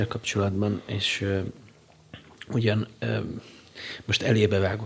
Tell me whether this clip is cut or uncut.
uncut